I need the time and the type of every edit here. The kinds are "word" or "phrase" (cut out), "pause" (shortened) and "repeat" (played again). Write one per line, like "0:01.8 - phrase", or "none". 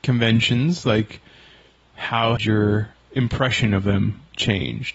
0:02.4 - word

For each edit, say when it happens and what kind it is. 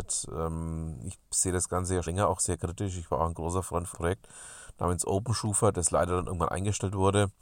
0:02.1 - word
0:03.9 - word

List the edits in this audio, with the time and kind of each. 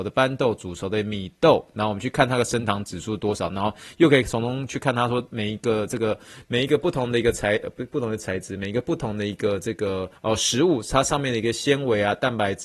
0:10.2 - pause

